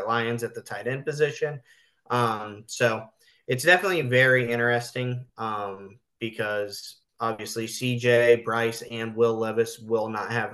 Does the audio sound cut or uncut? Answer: uncut